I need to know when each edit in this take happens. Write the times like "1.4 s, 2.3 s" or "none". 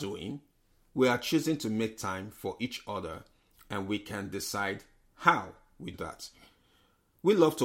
5.9 s